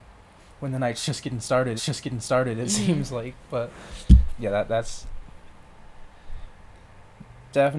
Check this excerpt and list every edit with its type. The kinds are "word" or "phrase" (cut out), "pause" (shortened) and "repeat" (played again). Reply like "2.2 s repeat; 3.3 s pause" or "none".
1.8 s repeat; 4.3 s word